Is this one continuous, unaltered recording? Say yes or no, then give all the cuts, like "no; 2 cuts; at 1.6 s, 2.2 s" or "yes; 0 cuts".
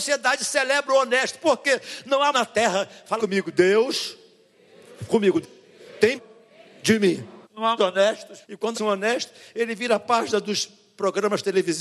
no; 8 cuts; at 2.3 s, 3.2 s, 5.4 s, 6.2 s, 7.4 s, 7.8 s, 8.4 s, 8.7 s